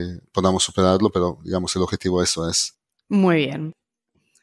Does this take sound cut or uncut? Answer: uncut